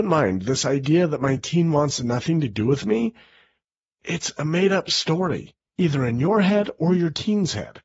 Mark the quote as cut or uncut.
uncut